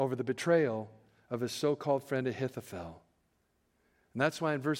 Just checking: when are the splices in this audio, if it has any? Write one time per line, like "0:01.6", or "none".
none